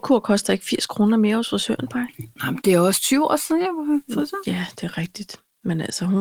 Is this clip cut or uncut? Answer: uncut